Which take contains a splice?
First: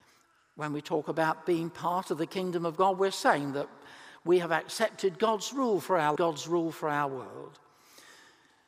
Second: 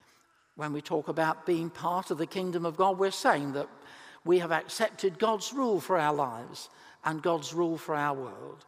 first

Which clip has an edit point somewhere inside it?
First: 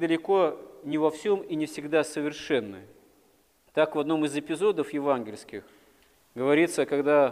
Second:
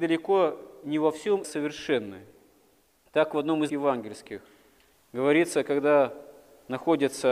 second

